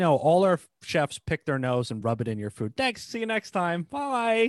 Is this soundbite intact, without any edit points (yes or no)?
yes